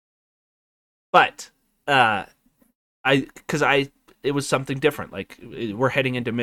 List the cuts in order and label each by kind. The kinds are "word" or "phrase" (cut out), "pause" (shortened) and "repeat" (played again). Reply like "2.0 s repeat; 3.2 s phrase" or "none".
none